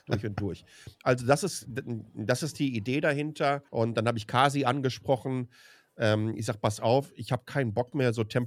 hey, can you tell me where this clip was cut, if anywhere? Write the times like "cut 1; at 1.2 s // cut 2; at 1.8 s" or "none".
cut 1; at 3.7 s